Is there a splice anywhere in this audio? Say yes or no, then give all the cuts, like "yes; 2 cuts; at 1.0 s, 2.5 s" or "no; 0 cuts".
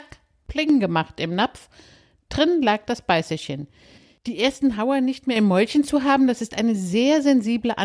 no; 0 cuts